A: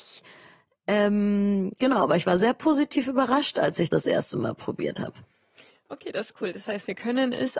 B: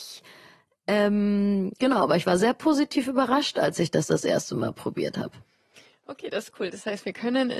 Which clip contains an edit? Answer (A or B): A